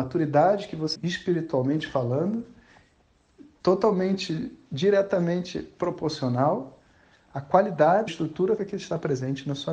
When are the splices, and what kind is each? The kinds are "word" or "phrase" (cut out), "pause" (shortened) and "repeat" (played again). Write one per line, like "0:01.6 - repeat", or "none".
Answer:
0:00.9 - word
0:03.6 - word
0:08.1 - word
0:08.6 - word

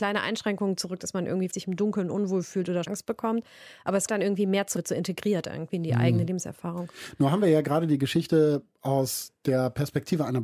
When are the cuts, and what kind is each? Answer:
0:01.5 - word
0:02.9 - word
0:04.1 - word
0:04.8 - word

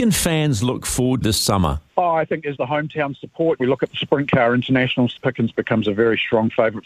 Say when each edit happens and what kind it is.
0:01.2 - word
0:01.9 - pause
0:02.5 - word
0:03.6 - phrase
0:05.2 - phrase

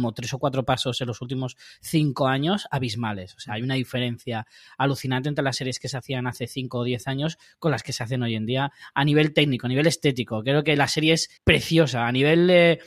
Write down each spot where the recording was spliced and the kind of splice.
0:11.4 - pause

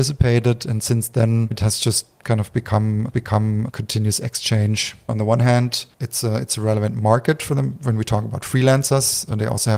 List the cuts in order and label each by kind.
0:03.1 - repeat
0:05.9 - pause

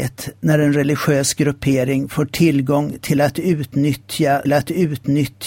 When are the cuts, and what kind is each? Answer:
0:04.4 - repeat

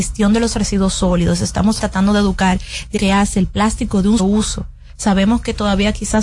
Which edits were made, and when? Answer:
0:01.8 - word
0:03.0 - word
0:04.2 - word

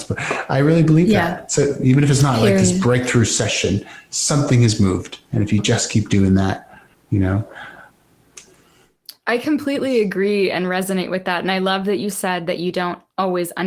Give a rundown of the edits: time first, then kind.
0:05.3 - pause
0:06.9 - pause

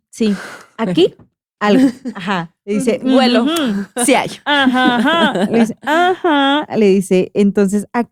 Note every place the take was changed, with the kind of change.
0:01.6 - word

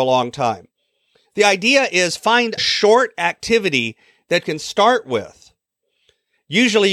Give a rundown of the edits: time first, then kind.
0:02.6 - word
0:04.4 - word

